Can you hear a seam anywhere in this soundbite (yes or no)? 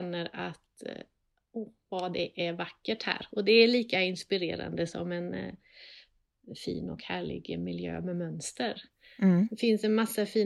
no